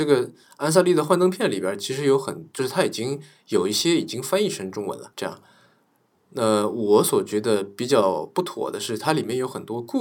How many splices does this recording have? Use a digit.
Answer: 1